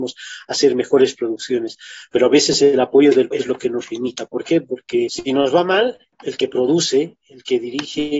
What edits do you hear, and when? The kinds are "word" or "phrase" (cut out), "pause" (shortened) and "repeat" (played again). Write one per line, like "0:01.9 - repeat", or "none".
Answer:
0:03.3 - word